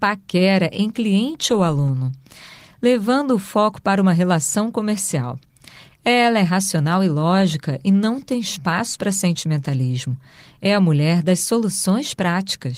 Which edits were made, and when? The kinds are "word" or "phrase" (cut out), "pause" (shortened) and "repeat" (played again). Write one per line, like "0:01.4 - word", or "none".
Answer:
none